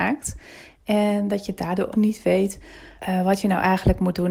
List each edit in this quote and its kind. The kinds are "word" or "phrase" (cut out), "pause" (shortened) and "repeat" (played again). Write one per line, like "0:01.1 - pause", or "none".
0:01.9 - word
0:03.0 - pause

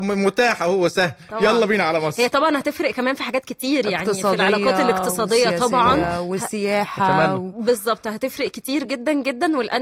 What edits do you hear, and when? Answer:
none

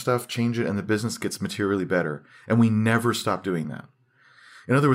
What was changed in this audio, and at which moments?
none

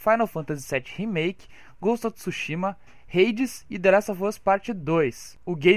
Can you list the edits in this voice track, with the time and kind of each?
none

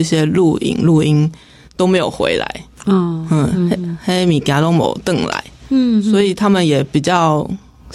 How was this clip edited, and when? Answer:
none

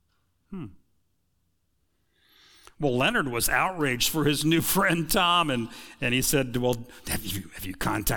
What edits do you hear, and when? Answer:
none

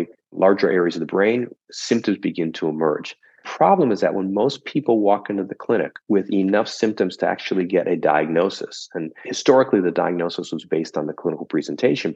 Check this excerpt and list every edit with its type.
0:06.0 - pause

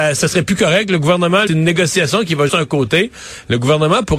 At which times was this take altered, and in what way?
0:01.5 - phrase
0:02.5 - word

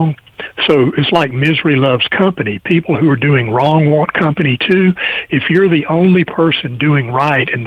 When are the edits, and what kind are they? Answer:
none

